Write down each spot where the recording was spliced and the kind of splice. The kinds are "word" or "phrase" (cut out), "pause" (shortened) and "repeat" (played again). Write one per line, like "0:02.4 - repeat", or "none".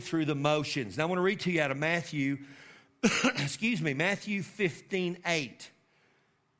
none